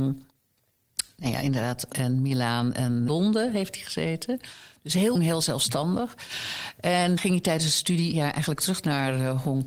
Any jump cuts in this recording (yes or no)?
yes